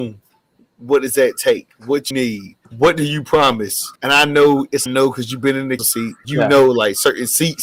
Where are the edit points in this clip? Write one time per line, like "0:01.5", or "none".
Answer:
0:01.8
0:02.1
0:02.6
0:04.0
0:04.9
0:05.8
0:06.2